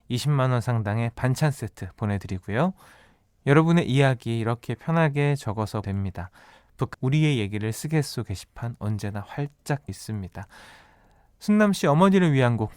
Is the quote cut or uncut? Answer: cut